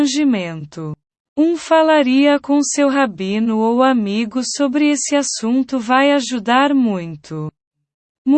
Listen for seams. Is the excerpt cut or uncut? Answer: uncut